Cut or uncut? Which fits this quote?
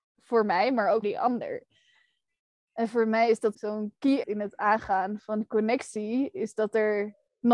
cut